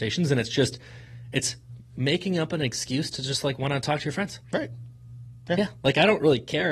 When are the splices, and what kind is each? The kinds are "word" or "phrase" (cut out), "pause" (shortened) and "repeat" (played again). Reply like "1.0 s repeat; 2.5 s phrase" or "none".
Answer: none